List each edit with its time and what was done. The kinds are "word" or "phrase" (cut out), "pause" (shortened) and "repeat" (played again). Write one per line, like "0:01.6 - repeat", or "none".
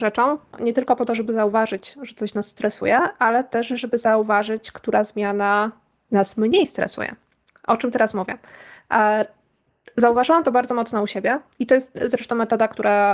none